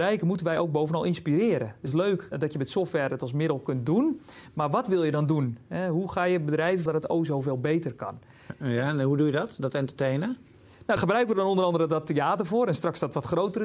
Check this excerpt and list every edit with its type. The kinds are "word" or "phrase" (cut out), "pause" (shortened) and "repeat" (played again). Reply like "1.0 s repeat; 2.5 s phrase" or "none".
1.9 s word; 2.3 s word; 6.9 s word; 11.0 s word